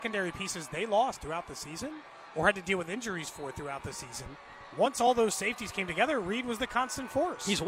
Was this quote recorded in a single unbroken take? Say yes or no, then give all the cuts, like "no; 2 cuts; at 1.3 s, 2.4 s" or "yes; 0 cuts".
yes; 0 cuts